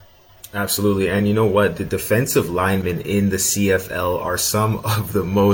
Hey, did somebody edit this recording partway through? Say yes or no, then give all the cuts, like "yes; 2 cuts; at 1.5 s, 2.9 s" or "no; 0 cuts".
no; 0 cuts